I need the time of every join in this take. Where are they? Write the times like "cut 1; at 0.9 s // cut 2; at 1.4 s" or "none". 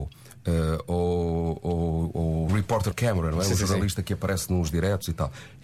cut 1; at 2.5 s // cut 2; at 2.9 s